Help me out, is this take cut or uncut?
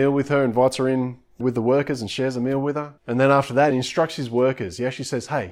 cut